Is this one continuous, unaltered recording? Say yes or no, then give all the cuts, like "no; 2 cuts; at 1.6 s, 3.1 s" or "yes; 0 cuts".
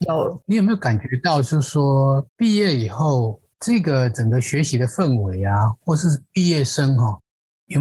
no; 1 cut; at 2.3 s